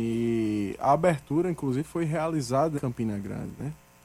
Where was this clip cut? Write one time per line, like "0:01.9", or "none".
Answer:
0:02.8

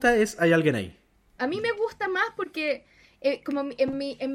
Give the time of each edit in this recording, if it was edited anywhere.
none

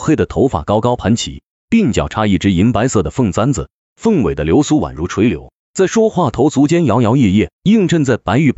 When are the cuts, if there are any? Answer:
0:05.6
0:07.5

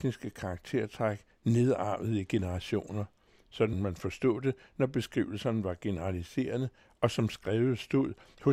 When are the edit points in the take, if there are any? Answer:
0:03.7

